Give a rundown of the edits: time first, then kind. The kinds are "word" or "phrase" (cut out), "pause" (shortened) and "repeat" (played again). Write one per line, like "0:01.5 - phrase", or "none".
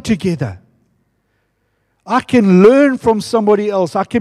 none